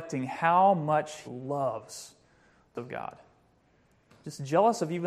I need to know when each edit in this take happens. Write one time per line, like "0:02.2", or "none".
0:01.3
0:02.8